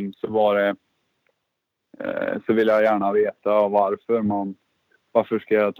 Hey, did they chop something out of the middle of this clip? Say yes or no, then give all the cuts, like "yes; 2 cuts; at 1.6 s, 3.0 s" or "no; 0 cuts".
no; 0 cuts